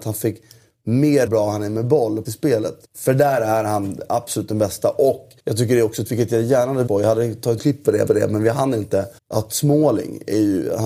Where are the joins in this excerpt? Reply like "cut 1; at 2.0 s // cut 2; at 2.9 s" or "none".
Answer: cut 1; at 1.3 s // cut 2; at 2.3 s // cut 3; at 2.8 s // cut 4; at 5.4 s // cut 5; at 6.0 s // cut 6; at 6.9 s // cut 7; at 7.6 s // cut 8; at 8.1 s // cut 9; at 9.2 s